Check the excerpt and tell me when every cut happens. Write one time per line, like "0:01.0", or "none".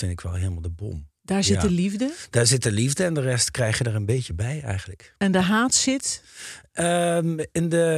none